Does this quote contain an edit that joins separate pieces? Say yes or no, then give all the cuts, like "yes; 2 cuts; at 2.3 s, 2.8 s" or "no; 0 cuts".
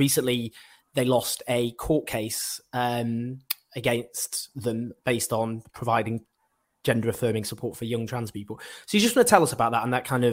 no; 0 cuts